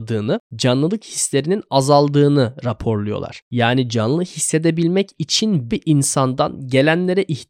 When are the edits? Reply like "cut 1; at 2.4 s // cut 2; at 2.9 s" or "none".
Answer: cut 1; at 5.7 s